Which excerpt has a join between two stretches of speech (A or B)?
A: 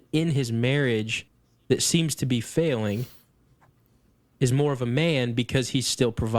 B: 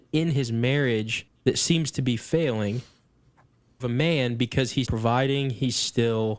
B